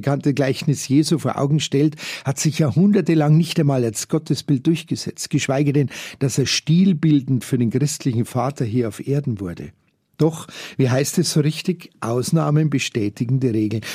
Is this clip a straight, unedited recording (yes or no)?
yes